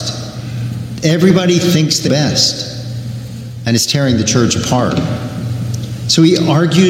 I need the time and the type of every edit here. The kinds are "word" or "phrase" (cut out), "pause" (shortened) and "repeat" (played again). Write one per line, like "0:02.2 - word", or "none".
0:02.1 - word